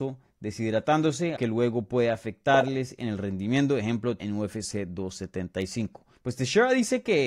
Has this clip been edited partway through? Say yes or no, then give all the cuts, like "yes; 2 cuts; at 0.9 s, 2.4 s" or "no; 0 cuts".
yes; 3 cuts; at 1.4 s, 4.2 s, 6.1 s